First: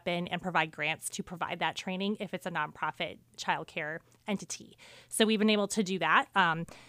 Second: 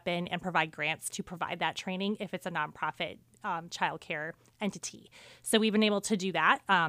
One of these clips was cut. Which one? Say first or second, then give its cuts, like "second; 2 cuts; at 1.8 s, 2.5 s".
first; 1 cut; at 3.4 s